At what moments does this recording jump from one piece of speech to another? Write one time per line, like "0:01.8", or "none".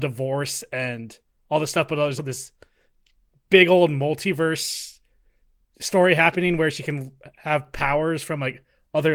0:02.2